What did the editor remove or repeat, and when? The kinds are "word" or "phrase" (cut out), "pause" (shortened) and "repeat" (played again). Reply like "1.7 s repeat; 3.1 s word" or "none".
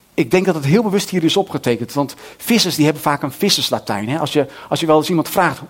none